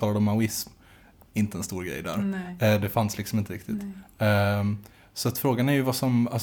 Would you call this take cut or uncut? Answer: uncut